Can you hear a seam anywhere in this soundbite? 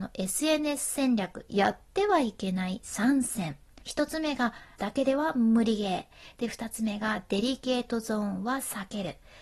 yes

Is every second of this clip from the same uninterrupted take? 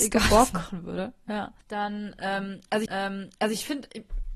no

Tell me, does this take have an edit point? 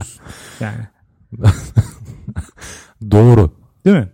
no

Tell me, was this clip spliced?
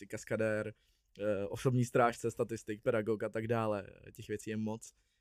no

